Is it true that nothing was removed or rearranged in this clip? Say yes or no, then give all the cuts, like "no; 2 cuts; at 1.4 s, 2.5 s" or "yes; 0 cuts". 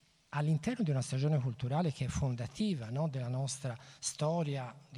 yes; 0 cuts